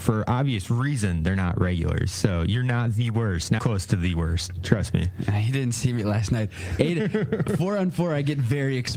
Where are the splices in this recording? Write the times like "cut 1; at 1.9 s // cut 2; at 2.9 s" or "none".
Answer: cut 1; at 3.6 s